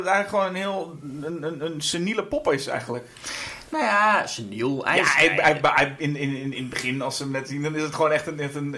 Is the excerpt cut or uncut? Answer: uncut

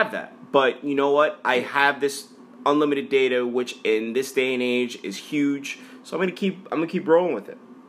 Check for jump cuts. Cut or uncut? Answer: uncut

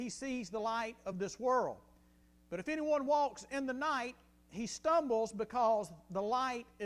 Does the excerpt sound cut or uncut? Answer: uncut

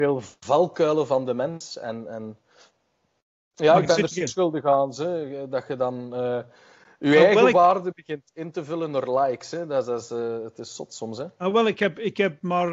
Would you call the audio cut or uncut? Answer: cut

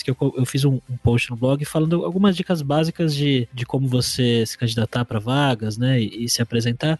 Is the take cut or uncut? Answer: uncut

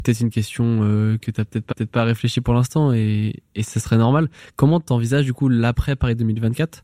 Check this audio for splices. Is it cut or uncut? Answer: cut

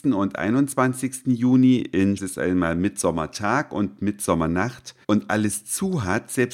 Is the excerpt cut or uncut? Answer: cut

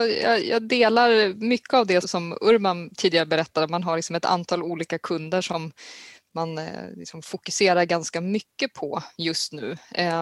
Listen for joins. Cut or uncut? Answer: cut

